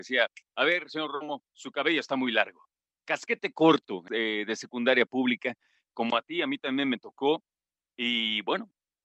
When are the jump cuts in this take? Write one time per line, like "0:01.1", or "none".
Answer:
0:01.5
0:04.1